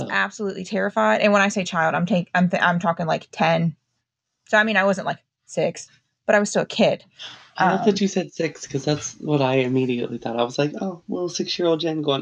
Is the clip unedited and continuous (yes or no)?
yes